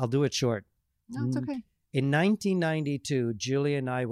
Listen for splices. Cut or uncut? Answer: uncut